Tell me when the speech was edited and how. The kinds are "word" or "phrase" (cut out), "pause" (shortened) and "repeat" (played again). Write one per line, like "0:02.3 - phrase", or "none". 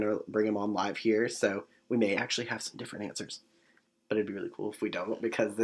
none